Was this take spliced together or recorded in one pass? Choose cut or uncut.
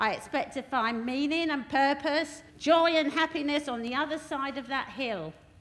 cut